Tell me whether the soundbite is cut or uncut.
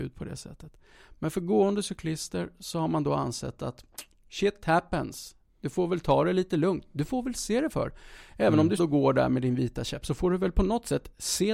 cut